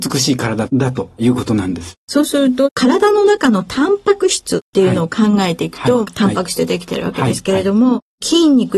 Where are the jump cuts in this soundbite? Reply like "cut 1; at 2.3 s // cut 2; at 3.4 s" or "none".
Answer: cut 1; at 6.1 s